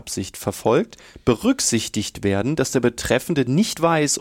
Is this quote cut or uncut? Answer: uncut